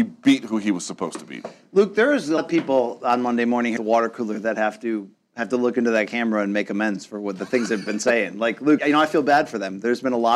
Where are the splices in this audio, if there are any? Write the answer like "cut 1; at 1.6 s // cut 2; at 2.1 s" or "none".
cut 1; at 2.4 s // cut 2; at 3.8 s // cut 3; at 7.9 s // cut 4; at 8.8 s